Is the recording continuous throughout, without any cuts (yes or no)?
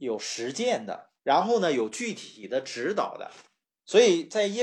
no